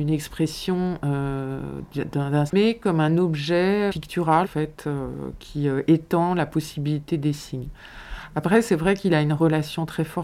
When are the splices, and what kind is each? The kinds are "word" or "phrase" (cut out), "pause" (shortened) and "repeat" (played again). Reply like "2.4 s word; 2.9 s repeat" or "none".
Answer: 2.5 s word; 3.9 s word; 4.4 s word